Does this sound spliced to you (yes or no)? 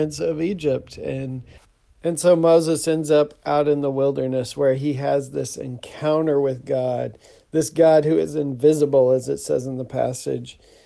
no